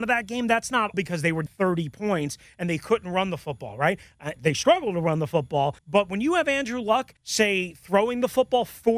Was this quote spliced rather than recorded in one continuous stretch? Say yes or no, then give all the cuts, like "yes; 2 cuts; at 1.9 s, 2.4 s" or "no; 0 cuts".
yes; 5 cuts; at 0.9 s, 1.5 s, 4.4 s, 5.8 s, 7.2 s